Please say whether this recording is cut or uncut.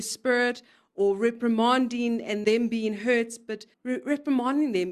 cut